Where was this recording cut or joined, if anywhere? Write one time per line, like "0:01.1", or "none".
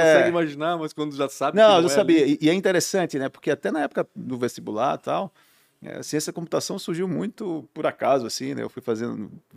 none